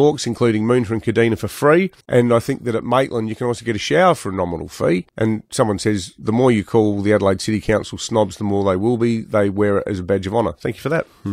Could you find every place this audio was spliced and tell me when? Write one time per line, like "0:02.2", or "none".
0:02.0
0:05.1